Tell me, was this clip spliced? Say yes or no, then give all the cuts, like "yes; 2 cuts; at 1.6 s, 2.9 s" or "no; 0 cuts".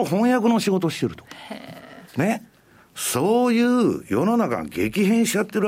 yes; 1 cut; at 2.1 s